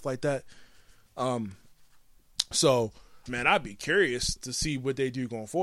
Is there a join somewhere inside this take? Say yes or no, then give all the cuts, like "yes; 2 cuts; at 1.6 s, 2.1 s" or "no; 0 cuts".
yes; 2 cuts; at 3.3 s, 4.4 s